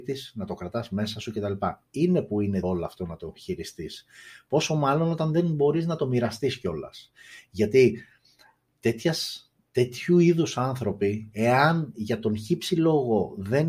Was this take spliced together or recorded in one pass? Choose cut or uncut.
cut